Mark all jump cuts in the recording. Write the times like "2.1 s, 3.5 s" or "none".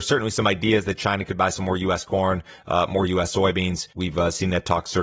3.9 s